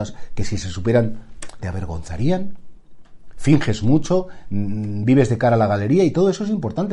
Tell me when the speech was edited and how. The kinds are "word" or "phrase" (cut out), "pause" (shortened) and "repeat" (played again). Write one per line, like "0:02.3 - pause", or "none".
0:01.6 - phrase